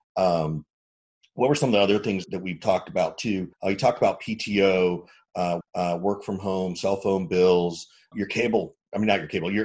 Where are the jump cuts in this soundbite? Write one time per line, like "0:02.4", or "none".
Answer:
0:02.2
0:03.5
0:05.6
0:08.1